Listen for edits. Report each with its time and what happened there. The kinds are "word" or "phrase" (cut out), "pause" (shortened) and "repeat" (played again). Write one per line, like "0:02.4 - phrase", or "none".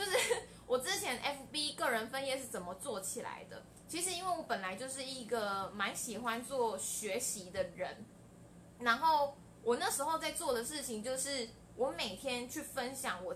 none